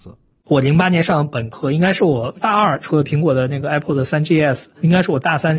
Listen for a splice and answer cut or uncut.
uncut